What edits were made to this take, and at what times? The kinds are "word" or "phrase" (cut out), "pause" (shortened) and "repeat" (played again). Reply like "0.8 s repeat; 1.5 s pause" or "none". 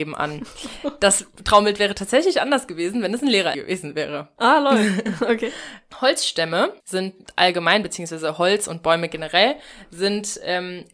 3.5 s word; 6.8 s pause

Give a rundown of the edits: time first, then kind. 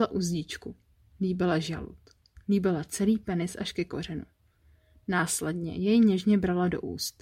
none

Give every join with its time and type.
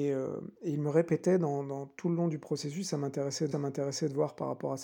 3.5 s repeat

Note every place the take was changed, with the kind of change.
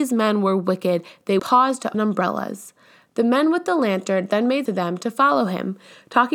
1.4 s word; 1.9 s word; 4.7 s word

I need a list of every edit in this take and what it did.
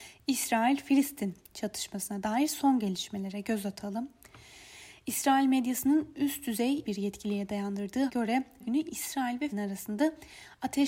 6.8 s word; 8.1 s word; 8.6 s word; 9.5 s word

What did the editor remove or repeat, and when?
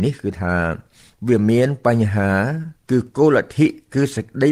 2.8 s pause

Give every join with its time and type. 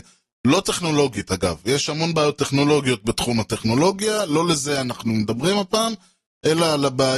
none

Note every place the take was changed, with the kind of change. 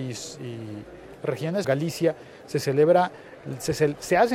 1.6 s phrase

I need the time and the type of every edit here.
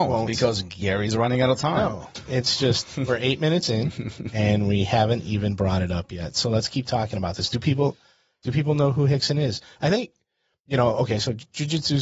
none

